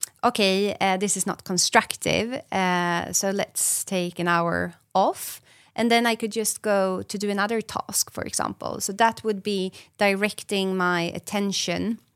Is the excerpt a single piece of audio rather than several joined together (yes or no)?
yes